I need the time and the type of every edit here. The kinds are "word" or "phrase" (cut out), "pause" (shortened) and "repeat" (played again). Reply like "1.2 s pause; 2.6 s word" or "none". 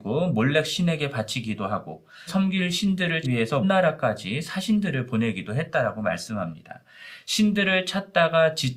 2.3 s word; 3.2 s word; 3.6 s word